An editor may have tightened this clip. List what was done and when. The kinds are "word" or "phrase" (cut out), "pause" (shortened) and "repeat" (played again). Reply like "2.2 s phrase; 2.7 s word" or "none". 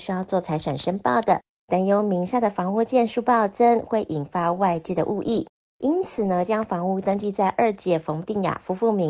1.5 s pause; 5.6 s pause